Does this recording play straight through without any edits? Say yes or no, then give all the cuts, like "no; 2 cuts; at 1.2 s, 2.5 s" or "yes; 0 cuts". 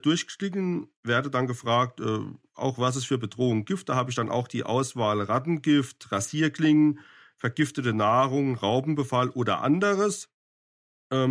yes; 0 cuts